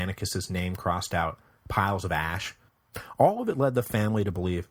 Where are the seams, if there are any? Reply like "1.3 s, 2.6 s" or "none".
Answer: none